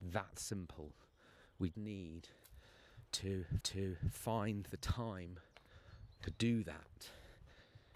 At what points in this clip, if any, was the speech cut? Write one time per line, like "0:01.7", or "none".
0:01.7
0:03.6

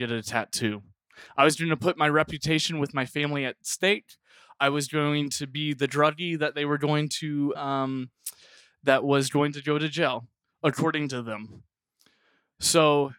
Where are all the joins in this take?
0:07.5

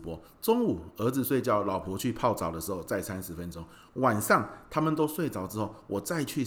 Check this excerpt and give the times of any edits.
none

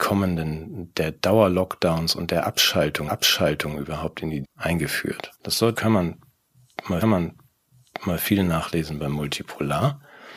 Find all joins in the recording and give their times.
0:03.1
0:04.4
0:05.3
0:05.7
0:07.0

